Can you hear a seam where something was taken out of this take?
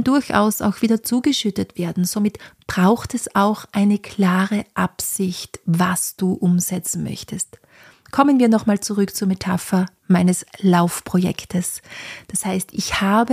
no; 0 cuts

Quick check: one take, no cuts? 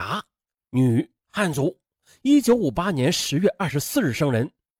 yes; 0 cuts

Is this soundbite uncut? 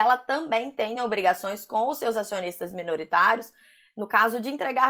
yes; 0 cuts

